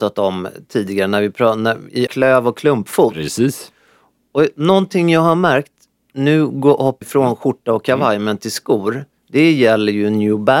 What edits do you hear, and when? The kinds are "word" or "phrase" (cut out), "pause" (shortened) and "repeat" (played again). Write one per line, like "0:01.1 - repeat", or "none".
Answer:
0:02.1 - word
0:07.0 - word